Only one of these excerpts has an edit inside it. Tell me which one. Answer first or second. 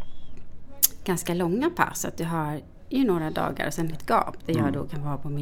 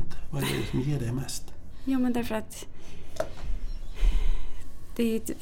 first